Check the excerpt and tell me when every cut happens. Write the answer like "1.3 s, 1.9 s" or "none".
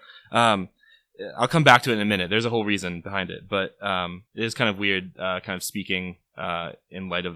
4.3 s